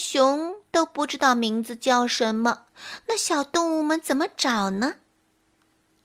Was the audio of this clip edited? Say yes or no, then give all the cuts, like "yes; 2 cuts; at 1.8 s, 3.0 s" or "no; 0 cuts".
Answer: no; 0 cuts